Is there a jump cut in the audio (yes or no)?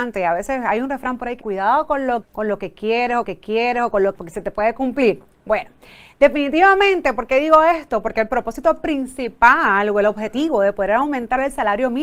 yes